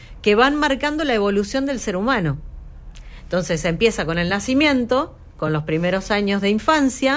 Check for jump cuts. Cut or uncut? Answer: uncut